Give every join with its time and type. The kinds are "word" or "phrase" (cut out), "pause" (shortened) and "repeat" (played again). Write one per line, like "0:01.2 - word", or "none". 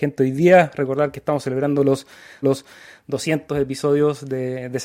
0:02.4 - repeat